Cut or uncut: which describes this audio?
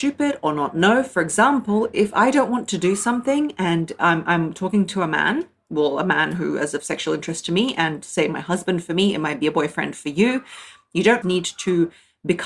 cut